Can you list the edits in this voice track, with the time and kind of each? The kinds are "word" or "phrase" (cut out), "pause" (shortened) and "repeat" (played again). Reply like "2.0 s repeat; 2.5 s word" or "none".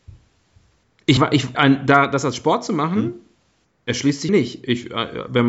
1.2 s word; 1.5 s word; 4.3 s word